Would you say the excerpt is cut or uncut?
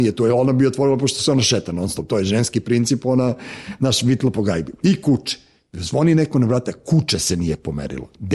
uncut